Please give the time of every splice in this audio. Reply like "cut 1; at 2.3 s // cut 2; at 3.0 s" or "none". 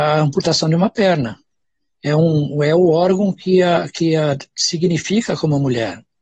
cut 1; at 1.6 s